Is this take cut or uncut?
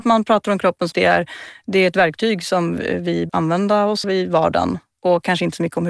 cut